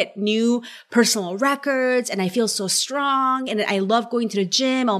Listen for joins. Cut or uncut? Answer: uncut